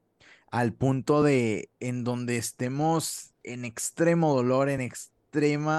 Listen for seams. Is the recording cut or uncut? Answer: uncut